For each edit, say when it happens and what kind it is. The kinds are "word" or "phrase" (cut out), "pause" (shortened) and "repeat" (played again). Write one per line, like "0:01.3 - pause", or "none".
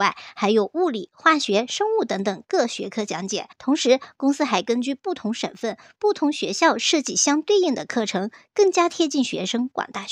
0:03.5 - pause